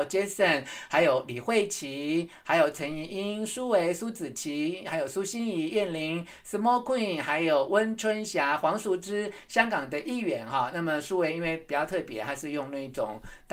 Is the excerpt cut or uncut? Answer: uncut